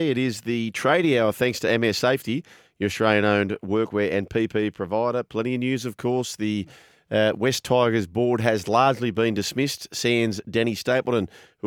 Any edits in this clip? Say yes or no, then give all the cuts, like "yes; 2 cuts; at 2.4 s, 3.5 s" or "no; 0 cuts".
no; 0 cuts